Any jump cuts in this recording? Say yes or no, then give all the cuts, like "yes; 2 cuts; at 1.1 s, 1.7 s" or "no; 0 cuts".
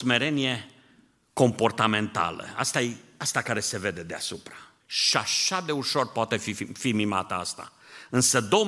yes; 1 cut; at 4.8 s